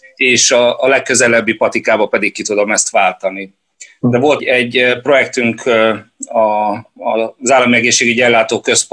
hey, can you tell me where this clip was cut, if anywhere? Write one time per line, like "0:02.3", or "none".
0:04.4